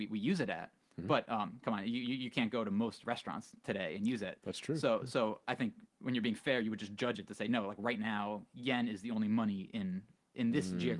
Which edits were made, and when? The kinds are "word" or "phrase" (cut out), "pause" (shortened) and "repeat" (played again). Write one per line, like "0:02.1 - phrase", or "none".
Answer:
0:05.9 - pause